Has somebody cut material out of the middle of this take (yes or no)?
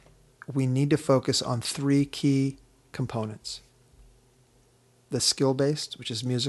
no